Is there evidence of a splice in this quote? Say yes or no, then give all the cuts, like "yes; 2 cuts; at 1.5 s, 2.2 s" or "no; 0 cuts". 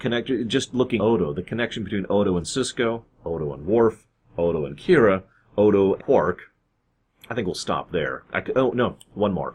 yes; 2 cuts; at 1.0 s, 6.0 s